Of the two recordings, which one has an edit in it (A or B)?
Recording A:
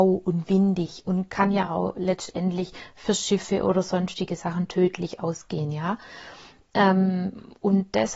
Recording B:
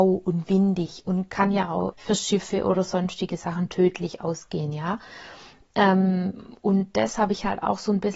B